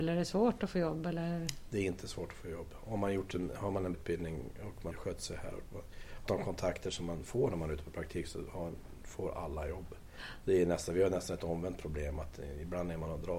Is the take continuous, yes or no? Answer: no